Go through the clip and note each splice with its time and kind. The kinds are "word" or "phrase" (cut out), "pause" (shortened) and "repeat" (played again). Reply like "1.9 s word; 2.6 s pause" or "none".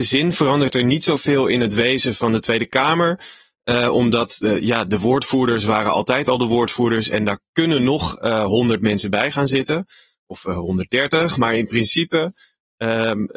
none